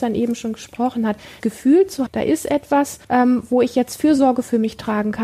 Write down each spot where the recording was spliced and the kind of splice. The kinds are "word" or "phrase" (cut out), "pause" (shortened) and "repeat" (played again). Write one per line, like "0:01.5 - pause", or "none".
0:01.4 - word
0:02.1 - word
0:03.0 - pause